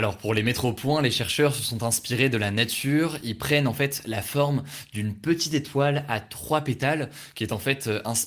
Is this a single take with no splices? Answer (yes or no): yes